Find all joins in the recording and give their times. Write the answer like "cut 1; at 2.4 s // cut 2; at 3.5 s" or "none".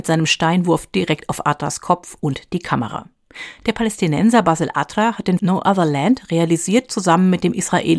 cut 1; at 5.4 s